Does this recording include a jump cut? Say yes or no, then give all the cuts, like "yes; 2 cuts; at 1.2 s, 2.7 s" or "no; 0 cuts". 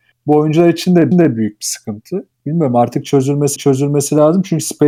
yes; 3 cuts; at 1.1 s, 2.3 s, 3.6 s